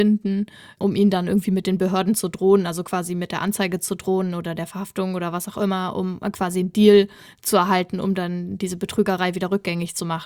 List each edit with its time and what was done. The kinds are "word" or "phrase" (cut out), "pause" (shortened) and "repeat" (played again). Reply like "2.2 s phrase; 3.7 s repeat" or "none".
none